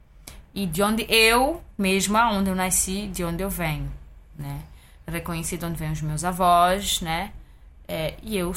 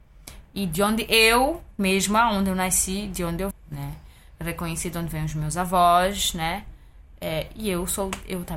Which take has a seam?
second; 1 cut; at 3.5 s

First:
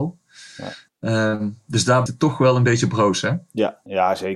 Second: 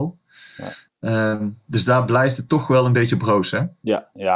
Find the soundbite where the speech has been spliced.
first; 1 cut; at 2.1 s

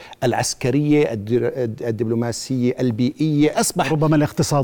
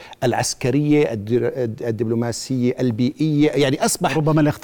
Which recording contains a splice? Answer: first; 1 cut; at 3.5 s

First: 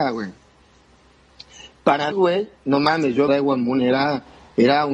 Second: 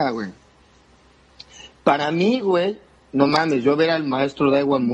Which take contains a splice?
first; 3 cuts; at 2.1 s, 2.5 s, 3.3 s

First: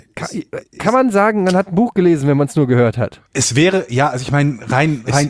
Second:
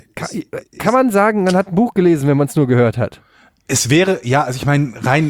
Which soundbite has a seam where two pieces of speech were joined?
first; 1 cut; at 3.3 s

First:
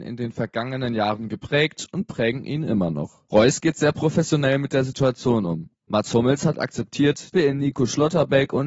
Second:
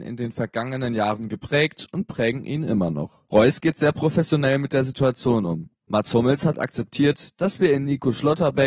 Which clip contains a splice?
first; 1 cut; at 7.3 s

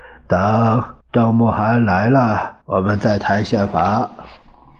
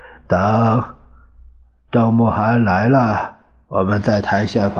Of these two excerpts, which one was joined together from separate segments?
first; 2 cuts; at 1.0 s, 2.6 s

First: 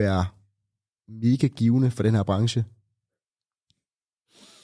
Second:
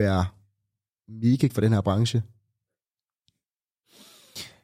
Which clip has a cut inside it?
second; 1 cut; at 1.5 s

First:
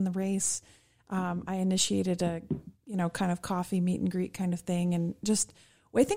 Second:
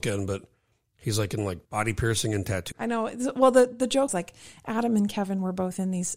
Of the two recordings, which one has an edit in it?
second; 3 cuts; at 1.6 s, 2.7 s, 4.1 s

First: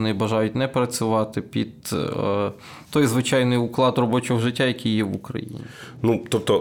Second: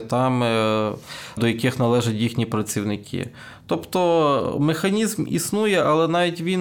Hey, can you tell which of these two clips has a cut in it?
second; 1 cut; at 1.4 s

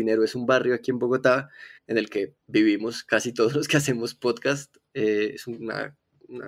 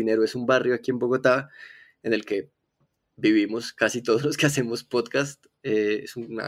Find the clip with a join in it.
first; 2 cuts; at 1.8 s, 2.4 s

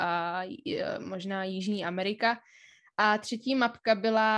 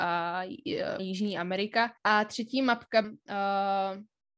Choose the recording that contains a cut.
second; 3 cuts; at 1.0 s, 2.0 s, 3.0 s

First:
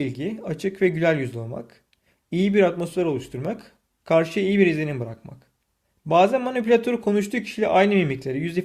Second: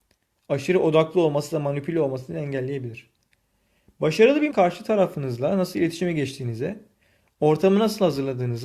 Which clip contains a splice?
second; 1 cut; at 4.5 s

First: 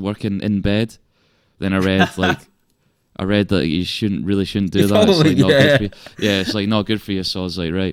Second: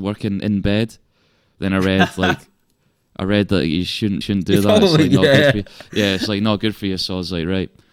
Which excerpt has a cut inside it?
second; 1 cut; at 4.2 s

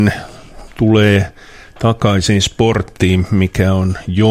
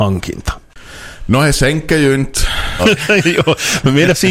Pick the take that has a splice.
second; 1 cut; at 2.8 s

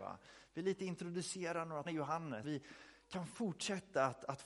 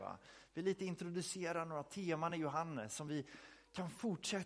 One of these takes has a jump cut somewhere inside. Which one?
first; 2 cuts; at 1.9 s, 2.4 s

